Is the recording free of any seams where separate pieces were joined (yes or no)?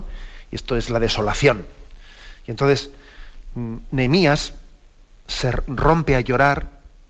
yes